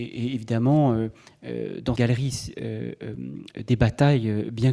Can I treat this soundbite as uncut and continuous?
no; 1 cut; at 2.0 s

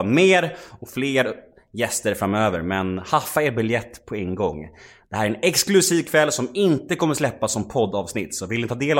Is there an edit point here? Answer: no; 0 cuts

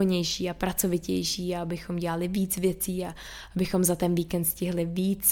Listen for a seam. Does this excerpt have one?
no; 0 cuts

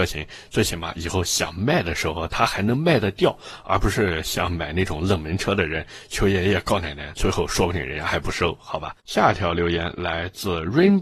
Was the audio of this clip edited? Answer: yes; 1 cut; at 9.0 s

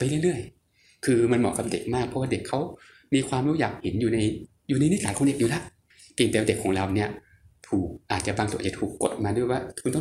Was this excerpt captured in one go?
yes; 0 cuts

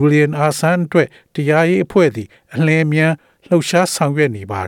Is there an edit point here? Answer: no; 0 cuts

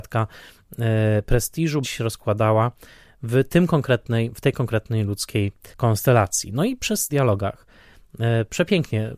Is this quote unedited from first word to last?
no; 3 cuts; at 1.8 s, 5.7 s, 7.1 s

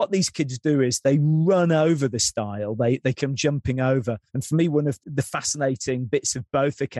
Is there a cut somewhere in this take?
yes; 2 cuts; at 4.3 s, 5.0 s

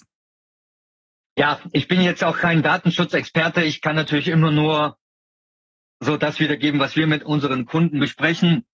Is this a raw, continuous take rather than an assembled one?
yes; 0 cuts

